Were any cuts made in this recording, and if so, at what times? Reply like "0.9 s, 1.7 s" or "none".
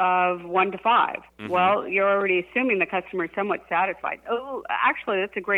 1.3 s